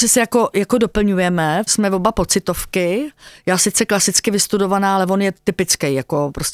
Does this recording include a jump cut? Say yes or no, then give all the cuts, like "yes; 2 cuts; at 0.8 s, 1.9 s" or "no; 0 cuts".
yes; 1 cut; at 1.7 s